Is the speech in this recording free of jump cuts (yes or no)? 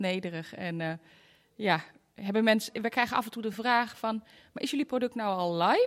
yes